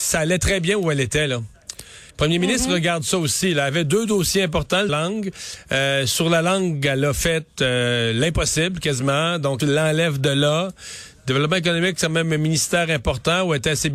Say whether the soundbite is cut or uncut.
cut